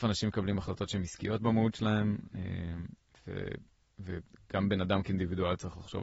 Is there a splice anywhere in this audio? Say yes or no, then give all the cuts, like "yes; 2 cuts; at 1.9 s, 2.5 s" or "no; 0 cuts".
no; 0 cuts